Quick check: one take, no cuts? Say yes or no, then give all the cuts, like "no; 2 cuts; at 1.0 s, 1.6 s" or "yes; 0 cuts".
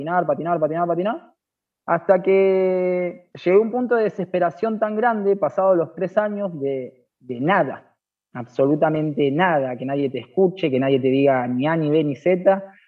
yes; 0 cuts